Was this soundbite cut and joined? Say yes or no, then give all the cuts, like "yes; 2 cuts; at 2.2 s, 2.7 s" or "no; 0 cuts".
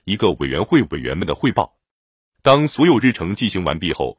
no; 0 cuts